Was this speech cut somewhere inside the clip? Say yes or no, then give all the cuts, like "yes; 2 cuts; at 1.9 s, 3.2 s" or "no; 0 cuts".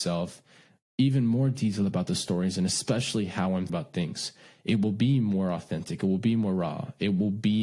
yes; 1 cut; at 3.7 s